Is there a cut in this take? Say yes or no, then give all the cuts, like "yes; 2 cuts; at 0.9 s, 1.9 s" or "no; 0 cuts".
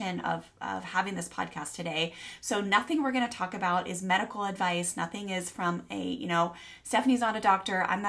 no; 0 cuts